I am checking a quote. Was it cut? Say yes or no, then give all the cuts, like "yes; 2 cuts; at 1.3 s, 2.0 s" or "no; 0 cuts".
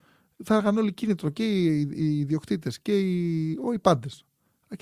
no; 0 cuts